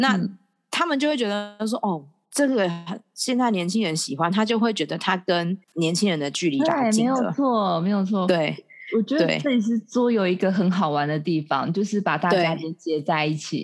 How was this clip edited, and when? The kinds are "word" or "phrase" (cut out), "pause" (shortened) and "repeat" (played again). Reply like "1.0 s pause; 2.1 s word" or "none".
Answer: 5.6 s pause